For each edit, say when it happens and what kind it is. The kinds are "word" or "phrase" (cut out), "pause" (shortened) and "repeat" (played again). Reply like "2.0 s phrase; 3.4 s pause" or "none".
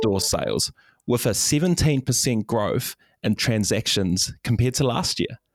3.4 s word